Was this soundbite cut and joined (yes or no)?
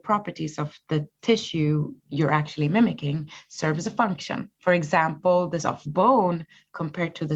yes